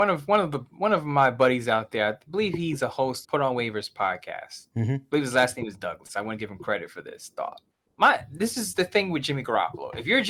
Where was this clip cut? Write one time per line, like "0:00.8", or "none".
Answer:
0:03.2
0:04.7
0:07.7